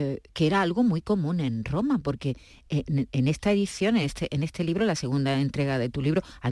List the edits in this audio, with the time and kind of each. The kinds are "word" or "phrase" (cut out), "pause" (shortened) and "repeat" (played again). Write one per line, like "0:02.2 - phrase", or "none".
none